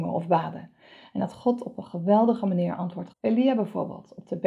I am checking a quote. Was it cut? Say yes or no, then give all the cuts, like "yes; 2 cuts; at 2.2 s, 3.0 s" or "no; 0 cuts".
yes; 1 cut; at 3.1 s